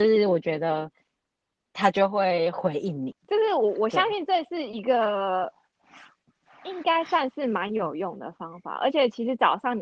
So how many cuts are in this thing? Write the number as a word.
one